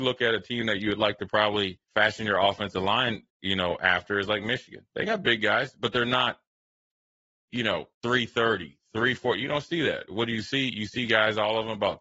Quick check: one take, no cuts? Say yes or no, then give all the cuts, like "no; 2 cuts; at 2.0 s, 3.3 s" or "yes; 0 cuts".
no; 3 cuts; at 1.8 s, 3.3 s, 7.9 s